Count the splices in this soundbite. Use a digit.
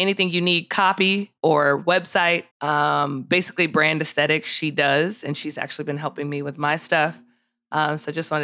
2